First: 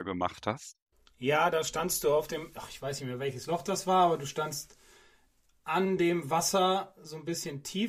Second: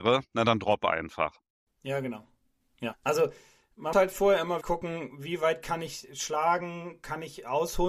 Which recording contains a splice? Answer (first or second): second